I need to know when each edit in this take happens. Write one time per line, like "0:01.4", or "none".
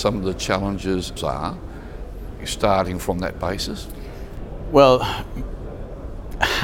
0:01.2